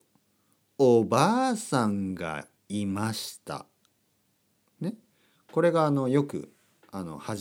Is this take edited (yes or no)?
yes